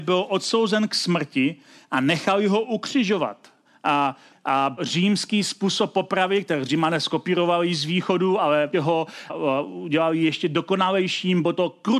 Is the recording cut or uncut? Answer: cut